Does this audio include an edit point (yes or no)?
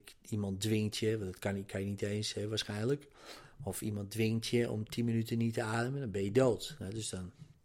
no